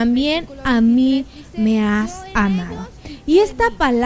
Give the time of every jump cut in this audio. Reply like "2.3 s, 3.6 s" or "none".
none